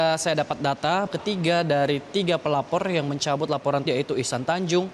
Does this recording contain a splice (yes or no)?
yes